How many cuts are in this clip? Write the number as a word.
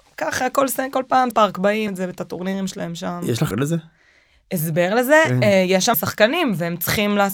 four